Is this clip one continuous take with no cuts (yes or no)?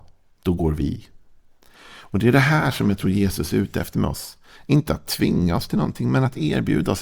yes